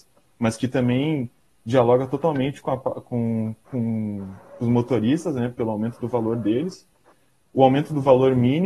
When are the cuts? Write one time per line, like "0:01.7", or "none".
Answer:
none